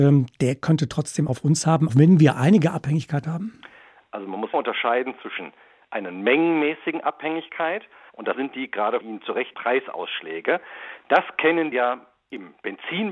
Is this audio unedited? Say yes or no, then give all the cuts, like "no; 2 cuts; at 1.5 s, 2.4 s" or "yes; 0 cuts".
no; 8 cuts; at 1.3 s, 1.9 s, 3.2 s, 4.5 s, 8.3 s, 9.0 s, 9.5 s, 11.7 s